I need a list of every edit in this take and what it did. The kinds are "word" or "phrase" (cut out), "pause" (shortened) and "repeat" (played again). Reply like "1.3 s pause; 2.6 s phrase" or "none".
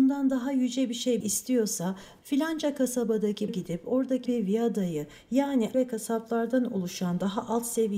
1.2 s word; 3.5 s word; 4.3 s word; 5.7 s word